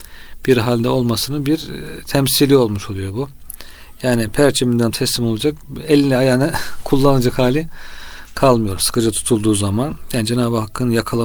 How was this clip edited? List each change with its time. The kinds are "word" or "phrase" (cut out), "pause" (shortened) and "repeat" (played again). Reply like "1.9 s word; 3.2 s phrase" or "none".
4.9 s phrase